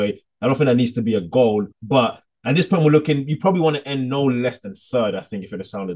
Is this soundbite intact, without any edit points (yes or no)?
no